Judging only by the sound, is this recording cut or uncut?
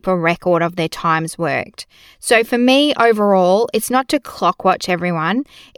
uncut